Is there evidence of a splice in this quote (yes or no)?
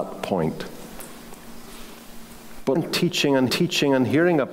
yes